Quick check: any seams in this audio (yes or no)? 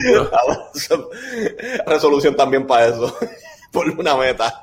yes